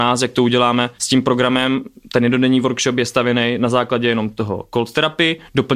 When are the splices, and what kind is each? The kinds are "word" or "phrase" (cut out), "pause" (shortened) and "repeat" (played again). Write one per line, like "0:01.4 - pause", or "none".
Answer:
0:01.0 - pause